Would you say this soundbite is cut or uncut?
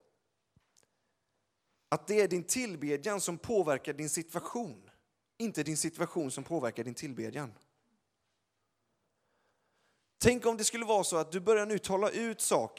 uncut